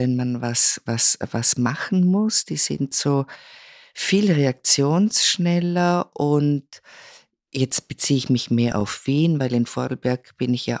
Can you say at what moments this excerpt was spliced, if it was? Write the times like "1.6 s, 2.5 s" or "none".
none